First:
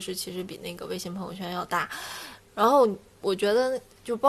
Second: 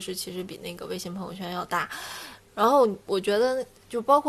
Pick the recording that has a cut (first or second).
second